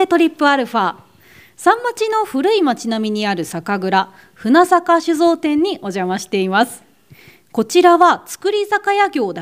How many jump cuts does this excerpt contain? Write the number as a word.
zero